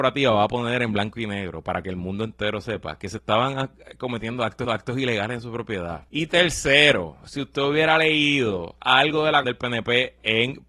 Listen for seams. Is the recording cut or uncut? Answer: cut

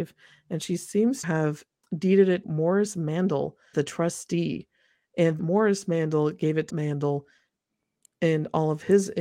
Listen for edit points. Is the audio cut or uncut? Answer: cut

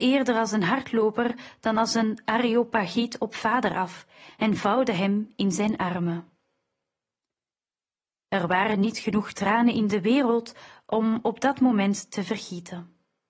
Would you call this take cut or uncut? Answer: uncut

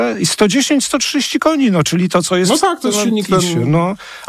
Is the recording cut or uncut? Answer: uncut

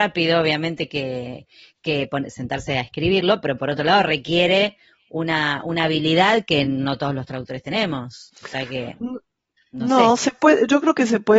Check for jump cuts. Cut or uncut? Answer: uncut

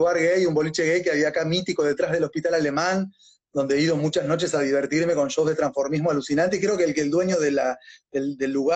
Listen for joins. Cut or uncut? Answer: uncut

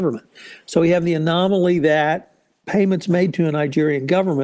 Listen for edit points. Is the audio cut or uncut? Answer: uncut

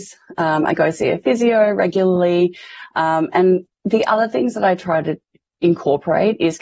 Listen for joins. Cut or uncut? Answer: uncut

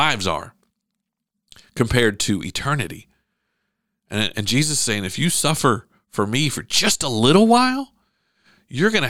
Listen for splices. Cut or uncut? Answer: uncut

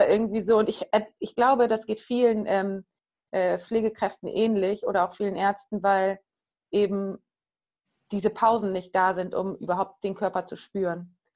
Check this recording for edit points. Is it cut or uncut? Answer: uncut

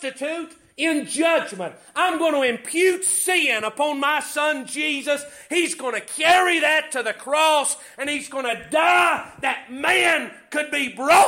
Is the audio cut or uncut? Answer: uncut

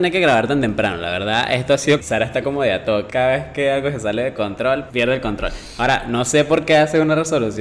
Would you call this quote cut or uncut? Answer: cut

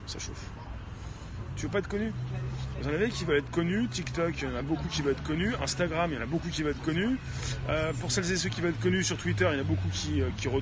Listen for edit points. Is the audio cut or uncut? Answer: uncut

